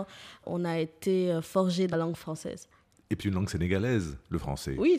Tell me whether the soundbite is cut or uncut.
cut